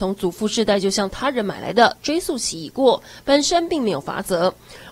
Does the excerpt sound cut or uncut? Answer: uncut